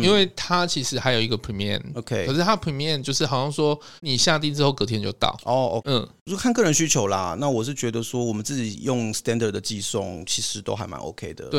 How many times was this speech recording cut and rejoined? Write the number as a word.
two